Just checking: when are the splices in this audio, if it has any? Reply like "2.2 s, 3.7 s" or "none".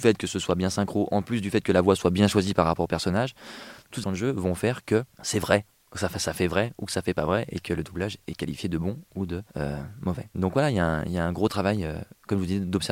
4.0 s, 5.1 s, 9.5 s